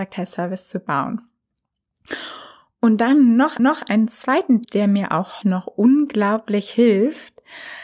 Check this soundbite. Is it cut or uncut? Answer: cut